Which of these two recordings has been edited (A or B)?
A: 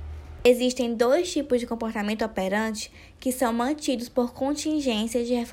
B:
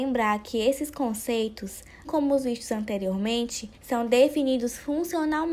B